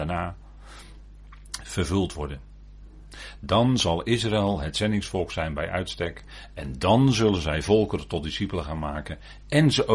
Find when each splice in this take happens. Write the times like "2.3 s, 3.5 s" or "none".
none